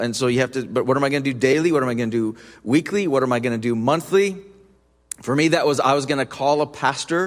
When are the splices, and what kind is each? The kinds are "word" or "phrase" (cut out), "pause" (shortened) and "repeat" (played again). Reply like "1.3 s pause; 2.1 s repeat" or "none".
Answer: none